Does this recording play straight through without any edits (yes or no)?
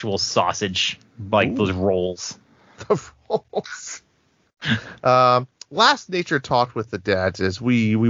yes